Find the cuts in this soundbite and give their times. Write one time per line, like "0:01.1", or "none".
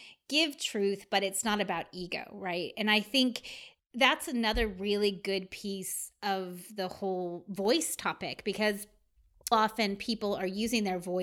0:09.5